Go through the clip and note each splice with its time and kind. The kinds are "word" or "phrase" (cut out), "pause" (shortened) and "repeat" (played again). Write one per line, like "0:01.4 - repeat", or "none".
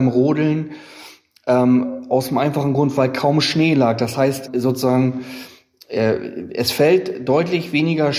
0:04.5 - word